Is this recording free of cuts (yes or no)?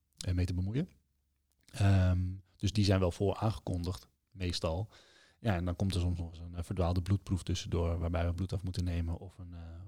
yes